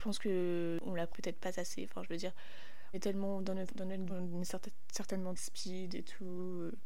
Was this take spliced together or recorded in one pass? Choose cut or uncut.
cut